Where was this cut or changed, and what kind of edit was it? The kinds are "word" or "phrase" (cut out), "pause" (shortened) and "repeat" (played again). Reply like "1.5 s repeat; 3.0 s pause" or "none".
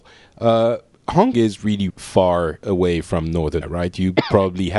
1.3 s word; 1.9 s word; 3.6 s word